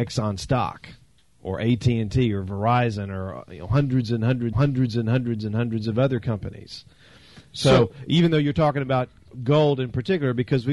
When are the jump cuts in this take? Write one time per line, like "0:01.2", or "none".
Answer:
0:04.5